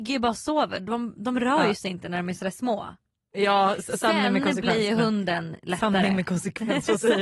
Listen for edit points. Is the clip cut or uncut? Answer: uncut